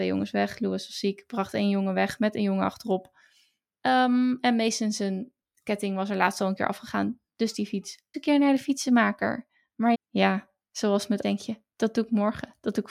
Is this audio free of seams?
no; 3 cuts; at 8.1 s, 9.9 s, 11.2 s

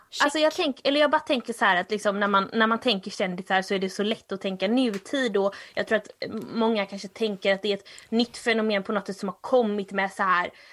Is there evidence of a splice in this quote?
no; 0 cuts

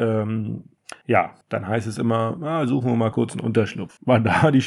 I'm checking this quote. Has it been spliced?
no; 0 cuts

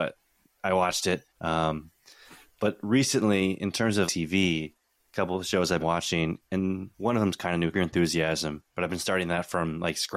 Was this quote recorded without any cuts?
no; 7 cuts; at 1.3 s, 4.1 s, 5.0 s, 5.8 s, 6.9 s, 7.7 s, 8.7 s

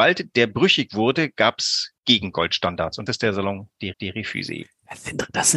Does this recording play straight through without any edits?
no; 3 cuts; at 2.0 s, 3.1 s, 3.9 s

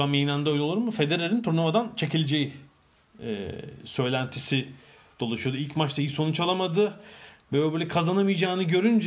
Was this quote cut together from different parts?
no; 0 cuts

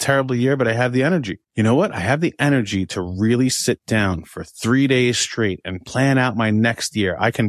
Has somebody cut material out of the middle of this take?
yes; 1 cut; at 1.4 s

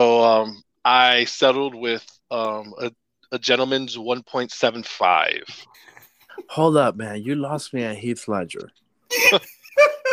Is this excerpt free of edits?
yes; 0 cuts

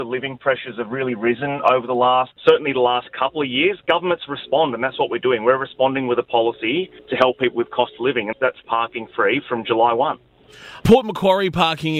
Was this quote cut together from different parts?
yes; 4 cuts; at 2.4 s, 7.0 s, 8.3 s, 8.6 s

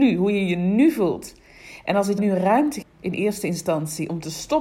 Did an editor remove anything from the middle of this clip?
yes; 2 cuts; at 2.2 s, 2.8 s

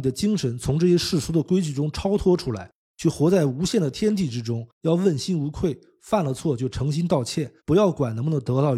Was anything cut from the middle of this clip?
yes; 2 cuts; at 4.7 s, 7.6 s

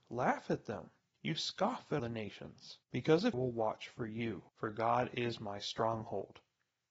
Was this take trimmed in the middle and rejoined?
yes; 5 cuts; at 1.1 s, 2.0 s, 2.8 s, 3.3 s, 4.5 s

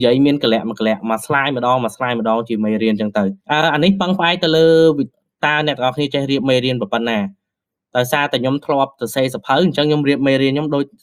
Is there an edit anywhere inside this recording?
yes; 1 cut; at 3.4 s

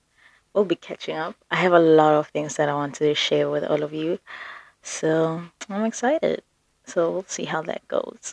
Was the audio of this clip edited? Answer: no; 0 cuts

